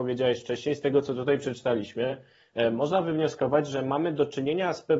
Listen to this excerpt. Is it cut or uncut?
uncut